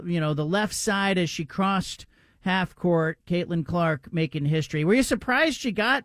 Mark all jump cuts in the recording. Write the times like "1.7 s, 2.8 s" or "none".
none